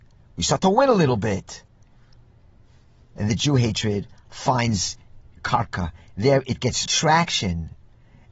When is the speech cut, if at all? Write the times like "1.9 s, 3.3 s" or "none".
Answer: 3.3 s, 6.9 s